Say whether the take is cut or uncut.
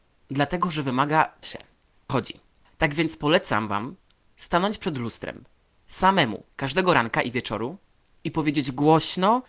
cut